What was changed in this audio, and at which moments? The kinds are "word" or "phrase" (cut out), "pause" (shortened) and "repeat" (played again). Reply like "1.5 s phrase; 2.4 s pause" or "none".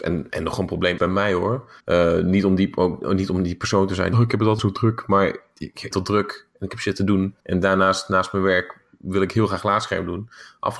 1.0 s word; 1.8 s pause; 4.1 s phrase; 4.6 s word; 5.9 s phrase; 7.4 s pause